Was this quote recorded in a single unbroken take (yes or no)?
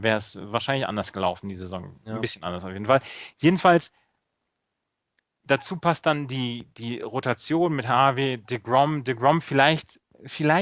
yes